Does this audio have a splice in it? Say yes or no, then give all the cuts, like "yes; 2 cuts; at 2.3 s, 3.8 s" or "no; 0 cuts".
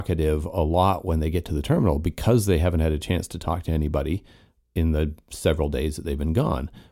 no; 0 cuts